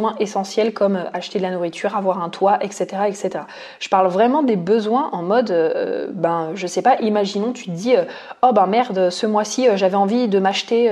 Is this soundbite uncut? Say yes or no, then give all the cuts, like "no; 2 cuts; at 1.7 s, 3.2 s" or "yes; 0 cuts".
yes; 0 cuts